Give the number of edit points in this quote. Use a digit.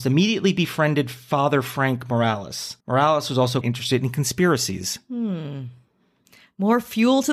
2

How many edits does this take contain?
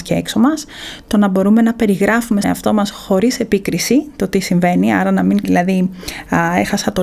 2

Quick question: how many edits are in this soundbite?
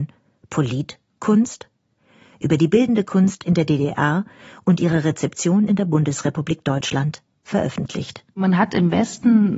0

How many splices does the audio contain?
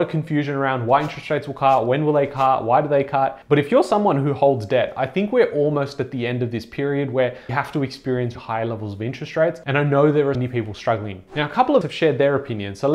5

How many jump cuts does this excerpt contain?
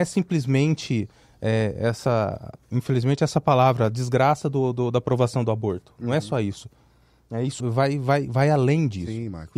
1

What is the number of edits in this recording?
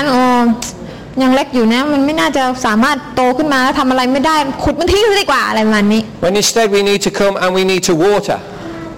0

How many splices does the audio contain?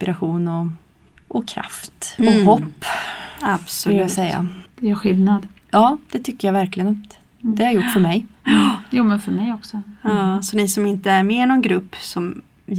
1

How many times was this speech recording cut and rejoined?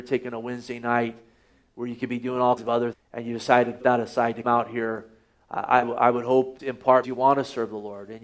7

